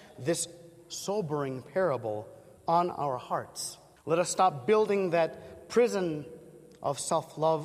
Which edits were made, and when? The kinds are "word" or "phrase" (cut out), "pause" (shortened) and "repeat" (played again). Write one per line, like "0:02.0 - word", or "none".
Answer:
0:02.6 - pause
0:04.0 - pause